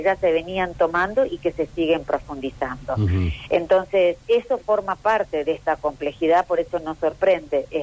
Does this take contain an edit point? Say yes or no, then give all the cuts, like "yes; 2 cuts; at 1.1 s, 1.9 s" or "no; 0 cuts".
no; 0 cuts